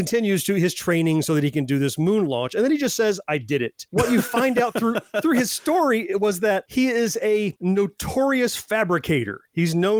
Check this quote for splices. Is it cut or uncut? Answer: uncut